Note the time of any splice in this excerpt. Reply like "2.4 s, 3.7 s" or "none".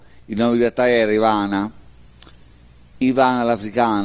none